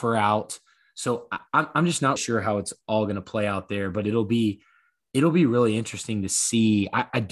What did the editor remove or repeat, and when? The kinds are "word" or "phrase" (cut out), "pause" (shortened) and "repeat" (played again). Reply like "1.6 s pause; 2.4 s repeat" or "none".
2.2 s word

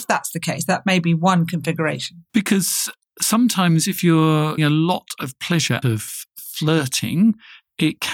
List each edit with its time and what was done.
2.3 s pause; 4.6 s word; 5.8 s word

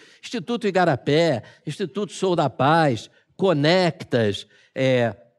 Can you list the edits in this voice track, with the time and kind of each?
none

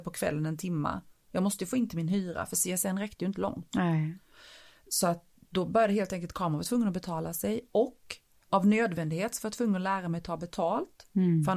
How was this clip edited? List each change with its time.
none

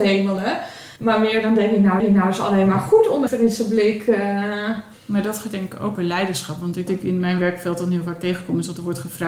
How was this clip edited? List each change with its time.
1.0 s pause; 2.0 s repeat; 3.3 s phrase; 5.0 s pause; 5.9 s word; 6.9 s word

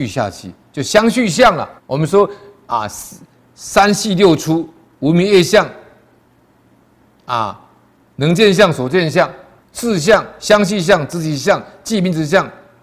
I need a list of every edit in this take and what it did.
1.8 s pause; 9.6 s pause

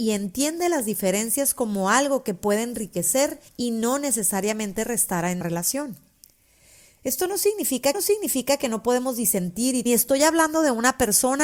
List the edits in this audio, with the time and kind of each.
3.5 s pause; 5.4 s word; 7.9 s repeat; 9.9 s phrase

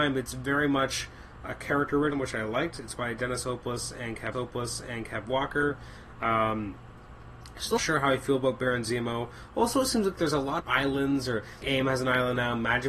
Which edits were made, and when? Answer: 1.4 s word; 2.1 s word; 4.3 s repeat; 7.8 s word; 10.6 s phrase; 11.6 s word

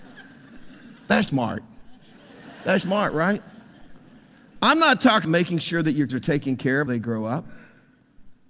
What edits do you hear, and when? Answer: 1.3 s word; 2.8 s word; 5.2 s word; 6.1 s word; 6.9 s word

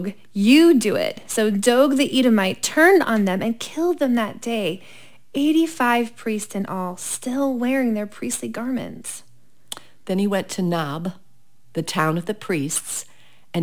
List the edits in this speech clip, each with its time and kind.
none

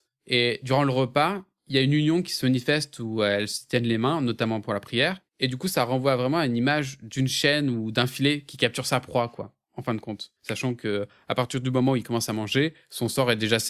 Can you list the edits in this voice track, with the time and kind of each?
10.4 s pause

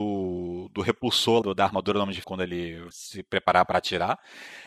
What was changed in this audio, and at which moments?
1.4 s word; 2.2 s word; 2.9 s word

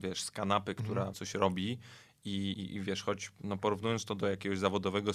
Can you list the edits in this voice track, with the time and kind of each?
1.1 s word; 2.5 s word

